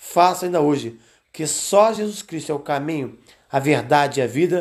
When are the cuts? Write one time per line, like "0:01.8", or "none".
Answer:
none